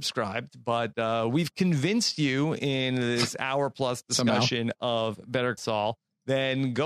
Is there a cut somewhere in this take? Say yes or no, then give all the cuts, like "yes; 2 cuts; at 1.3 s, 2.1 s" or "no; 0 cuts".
yes; 1 cut; at 5.6 s